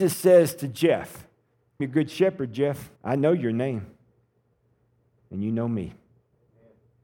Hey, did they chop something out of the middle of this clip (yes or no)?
yes